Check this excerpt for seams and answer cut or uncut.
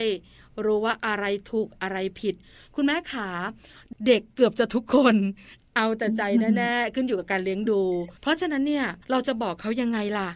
cut